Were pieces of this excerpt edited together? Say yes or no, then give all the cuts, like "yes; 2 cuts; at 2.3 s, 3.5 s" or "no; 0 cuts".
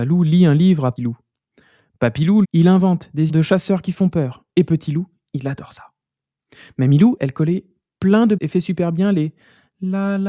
yes; 5 cuts; at 1.0 s, 2.4 s, 3.3 s, 7.2 s, 8.4 s